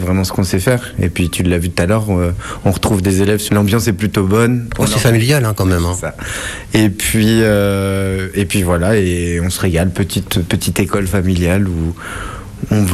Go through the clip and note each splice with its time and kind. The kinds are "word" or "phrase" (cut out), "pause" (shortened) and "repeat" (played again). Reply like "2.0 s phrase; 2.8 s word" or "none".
3.5 s phrase